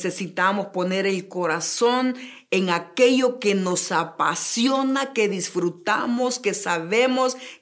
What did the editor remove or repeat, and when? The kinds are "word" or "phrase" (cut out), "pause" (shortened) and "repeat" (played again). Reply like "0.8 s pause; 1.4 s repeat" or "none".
none